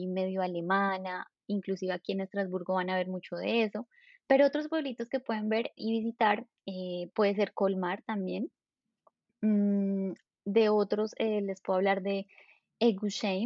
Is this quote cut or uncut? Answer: uncut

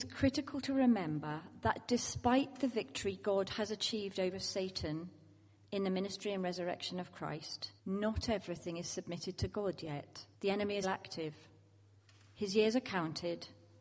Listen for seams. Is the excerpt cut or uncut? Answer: cut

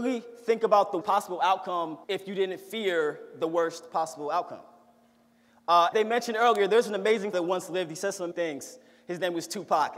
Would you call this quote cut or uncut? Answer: cut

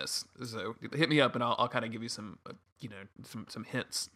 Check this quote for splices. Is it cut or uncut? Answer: uncut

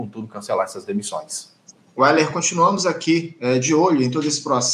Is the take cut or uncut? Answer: uncut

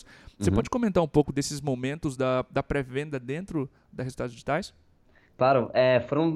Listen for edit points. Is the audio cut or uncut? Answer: uncut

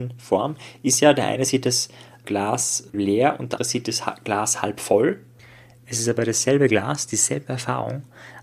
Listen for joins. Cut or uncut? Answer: cut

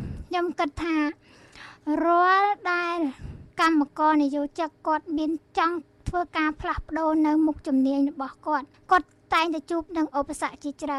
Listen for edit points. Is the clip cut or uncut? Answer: cut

